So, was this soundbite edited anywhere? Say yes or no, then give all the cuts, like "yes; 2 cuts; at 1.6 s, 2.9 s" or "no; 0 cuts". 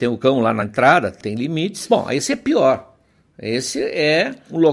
no; 0 cuts